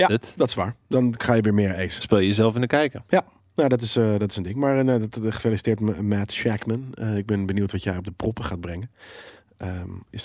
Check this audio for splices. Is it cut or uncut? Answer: uncut